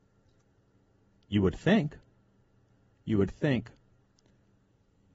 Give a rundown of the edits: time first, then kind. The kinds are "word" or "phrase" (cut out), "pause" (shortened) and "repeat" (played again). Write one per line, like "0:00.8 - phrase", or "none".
none